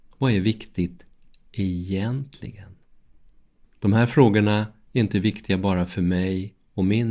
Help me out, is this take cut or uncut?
uncut